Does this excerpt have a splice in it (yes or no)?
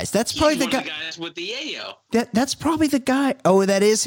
no